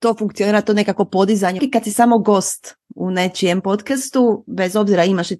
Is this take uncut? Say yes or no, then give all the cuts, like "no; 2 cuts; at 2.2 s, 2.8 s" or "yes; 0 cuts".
no; 1 cut; at 1.6 s